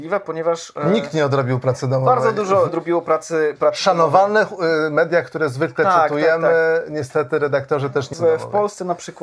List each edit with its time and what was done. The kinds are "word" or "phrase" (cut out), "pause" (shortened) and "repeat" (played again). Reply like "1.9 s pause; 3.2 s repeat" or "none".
2.7 s phrase; 8.1 s phrase

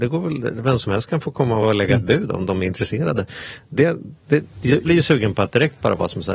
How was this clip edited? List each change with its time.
1.6 s word; 4.8 s word

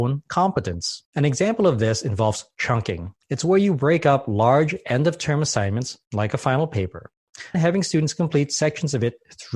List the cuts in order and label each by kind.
1.1 s pause; 3.2 s pause; 7.5 s word

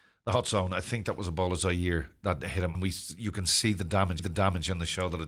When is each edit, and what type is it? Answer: 2.7 s word; 4.2 s repeat

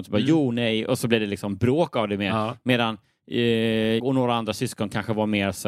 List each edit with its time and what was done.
4.0 s word

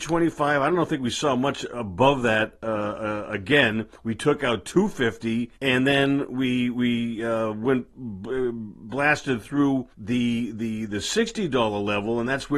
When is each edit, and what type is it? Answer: 4.0 s pause; 5.6 s pause; 9.9 s pause

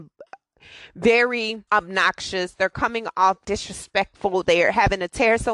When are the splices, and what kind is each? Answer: 1.7 s pause; 3.4 s word

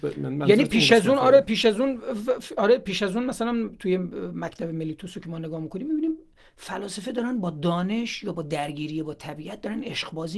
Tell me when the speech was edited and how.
none

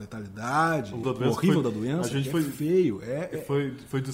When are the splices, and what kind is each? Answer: 1.0 s word

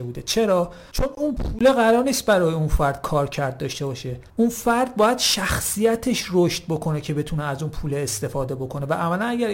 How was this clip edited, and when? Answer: 4.3 s pause

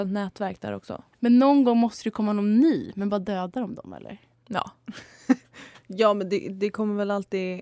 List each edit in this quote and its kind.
1.1 s pause; 4.3 s pause

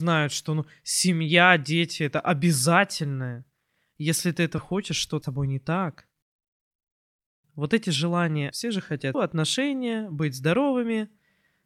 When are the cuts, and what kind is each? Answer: 4.6 s word; 5.2 s word; 8.5 s word; 9.1 s word

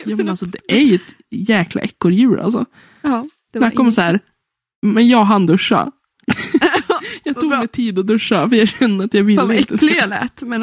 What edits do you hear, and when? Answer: none

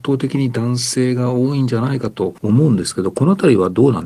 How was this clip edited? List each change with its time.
2.4 s pause

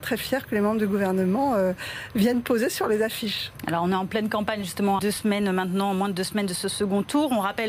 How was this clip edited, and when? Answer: 5.0 s word

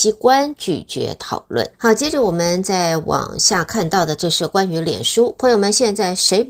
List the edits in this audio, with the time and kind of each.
1.7 s pause

